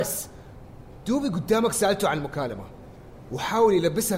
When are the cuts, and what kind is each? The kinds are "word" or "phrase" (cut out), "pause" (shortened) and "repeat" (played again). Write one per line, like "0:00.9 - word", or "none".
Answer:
none